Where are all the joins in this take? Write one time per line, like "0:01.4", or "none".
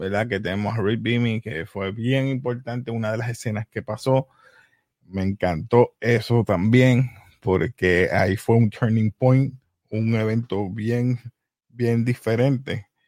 none